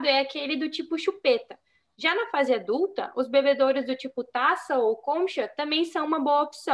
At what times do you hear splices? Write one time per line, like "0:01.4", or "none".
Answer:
none